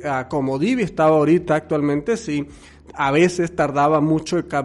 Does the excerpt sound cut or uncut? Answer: uncut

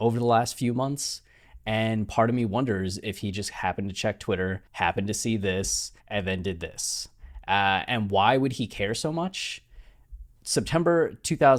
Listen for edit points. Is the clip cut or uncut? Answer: cut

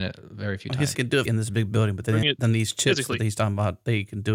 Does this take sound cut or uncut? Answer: cut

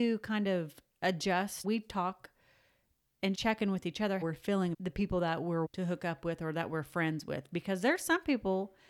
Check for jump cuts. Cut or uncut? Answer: cut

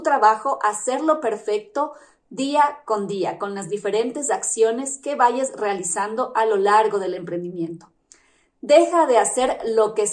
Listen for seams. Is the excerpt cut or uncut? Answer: uncut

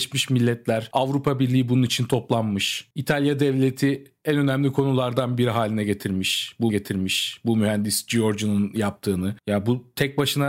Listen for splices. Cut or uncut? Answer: cut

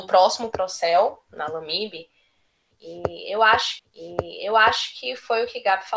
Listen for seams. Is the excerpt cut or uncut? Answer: cut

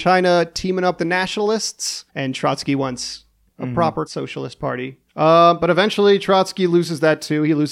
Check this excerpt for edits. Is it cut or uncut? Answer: cut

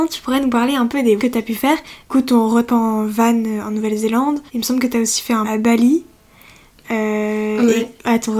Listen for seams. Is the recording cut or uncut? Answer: cut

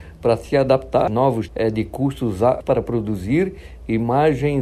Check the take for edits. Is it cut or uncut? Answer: cut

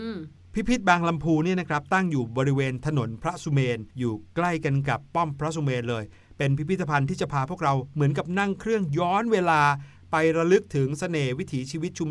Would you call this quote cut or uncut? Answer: cut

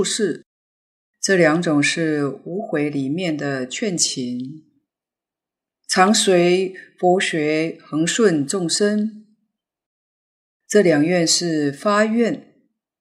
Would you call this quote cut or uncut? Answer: uncut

